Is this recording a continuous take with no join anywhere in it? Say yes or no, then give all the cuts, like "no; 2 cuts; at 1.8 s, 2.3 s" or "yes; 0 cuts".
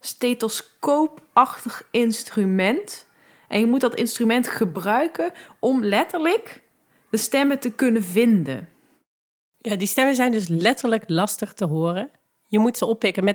yes; 0 cuts